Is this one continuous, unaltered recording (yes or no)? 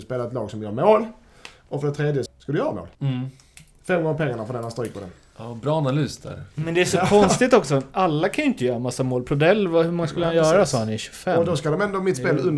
no